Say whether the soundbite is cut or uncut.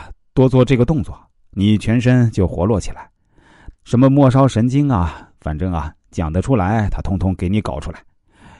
cut